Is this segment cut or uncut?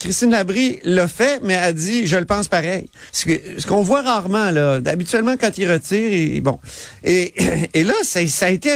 cut